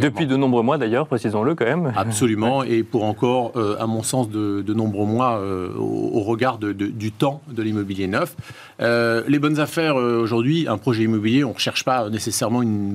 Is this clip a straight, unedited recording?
yes; 0 cuts

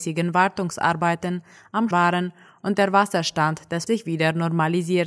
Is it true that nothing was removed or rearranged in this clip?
no; 2 cuts; at 1.9 s, 3.9 s

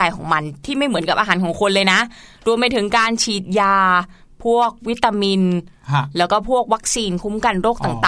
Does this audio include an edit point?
no; 0 cuts

